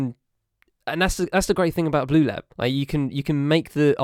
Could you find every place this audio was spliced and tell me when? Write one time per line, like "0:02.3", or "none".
0:02.5

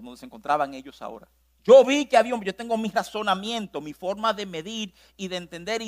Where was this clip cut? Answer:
0:01.4

